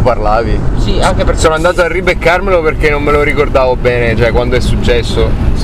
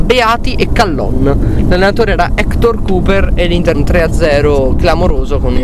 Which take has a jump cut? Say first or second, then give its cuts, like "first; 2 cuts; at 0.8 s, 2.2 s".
second; 1 cut; at 3.7 s